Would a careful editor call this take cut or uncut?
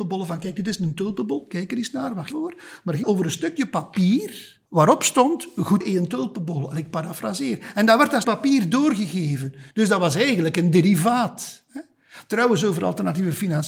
cut